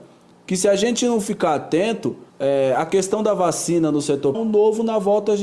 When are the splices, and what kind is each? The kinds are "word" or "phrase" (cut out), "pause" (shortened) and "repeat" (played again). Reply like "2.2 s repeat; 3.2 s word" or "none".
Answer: 2.3 s pause; 4.3 s phrase